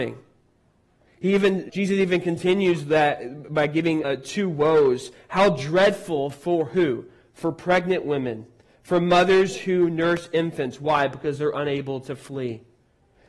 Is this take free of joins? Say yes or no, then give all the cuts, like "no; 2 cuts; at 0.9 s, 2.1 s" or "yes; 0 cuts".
no; 2 cuts; at 1.7 s, 4.0 s